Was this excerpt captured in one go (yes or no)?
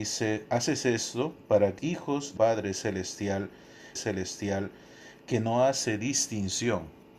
no